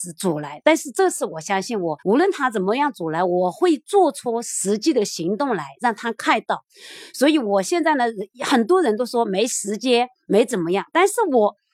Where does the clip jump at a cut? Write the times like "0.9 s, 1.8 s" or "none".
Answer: 2.0 s